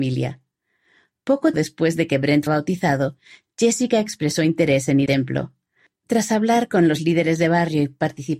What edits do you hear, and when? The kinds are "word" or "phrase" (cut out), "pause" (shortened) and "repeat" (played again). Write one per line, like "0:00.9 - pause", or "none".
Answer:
0:01.5 - word
0:02.5 - word
0:05.1 - word